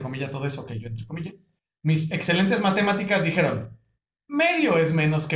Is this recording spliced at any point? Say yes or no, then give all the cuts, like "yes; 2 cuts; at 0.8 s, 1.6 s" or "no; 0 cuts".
no; 0 cuts